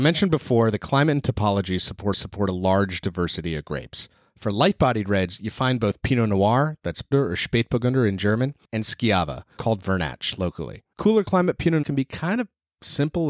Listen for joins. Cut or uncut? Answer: cut